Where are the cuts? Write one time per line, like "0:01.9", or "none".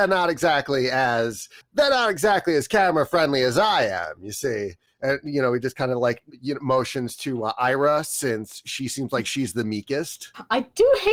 none